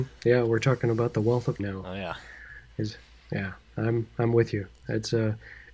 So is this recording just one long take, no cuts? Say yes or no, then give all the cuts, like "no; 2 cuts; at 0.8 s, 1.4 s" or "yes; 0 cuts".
no; 1 cut; at 1.6 s